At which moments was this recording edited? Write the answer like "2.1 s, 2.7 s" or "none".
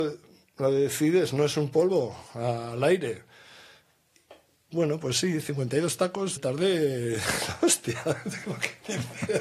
2.3 s, 6.4 s